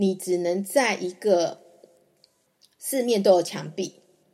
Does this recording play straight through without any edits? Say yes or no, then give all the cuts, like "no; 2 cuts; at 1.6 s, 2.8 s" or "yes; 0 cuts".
yes; 0 cuts